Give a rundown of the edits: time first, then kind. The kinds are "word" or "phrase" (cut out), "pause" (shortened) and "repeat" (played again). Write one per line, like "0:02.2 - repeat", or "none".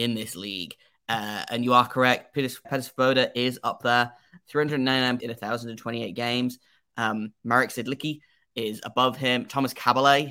0:02.6 - word
0:05.2 - word